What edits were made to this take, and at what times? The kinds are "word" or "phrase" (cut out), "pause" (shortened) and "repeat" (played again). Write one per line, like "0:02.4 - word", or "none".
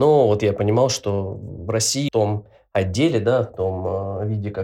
0:02.1 - phrase